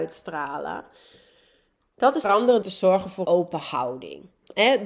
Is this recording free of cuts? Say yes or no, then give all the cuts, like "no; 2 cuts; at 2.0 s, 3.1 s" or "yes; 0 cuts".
no; 3 cuts; at 2.2 s, 2.6 s, 3.2 s